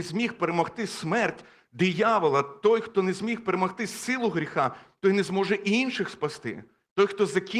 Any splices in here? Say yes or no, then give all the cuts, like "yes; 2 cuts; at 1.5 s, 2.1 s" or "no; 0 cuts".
no; 0 cuts